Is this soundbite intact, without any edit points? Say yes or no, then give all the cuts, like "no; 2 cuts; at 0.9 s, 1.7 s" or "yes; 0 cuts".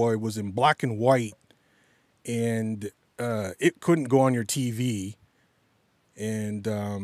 yes; 0 cuts